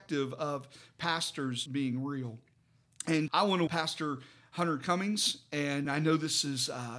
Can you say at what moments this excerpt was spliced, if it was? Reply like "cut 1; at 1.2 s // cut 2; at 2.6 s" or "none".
cut 1; at 1.7 s // cut 2; at 3.3 s // cut 3; at 3.7 s // cut 4; at 5.8 s